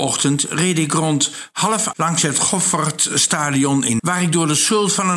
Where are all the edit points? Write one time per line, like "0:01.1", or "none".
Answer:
0:01.9
0:04.0